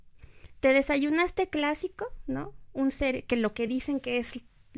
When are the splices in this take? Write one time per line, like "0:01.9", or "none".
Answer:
none